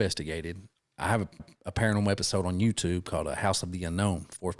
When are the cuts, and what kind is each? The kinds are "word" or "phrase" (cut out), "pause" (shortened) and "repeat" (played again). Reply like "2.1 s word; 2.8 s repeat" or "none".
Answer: 1.4 s repeat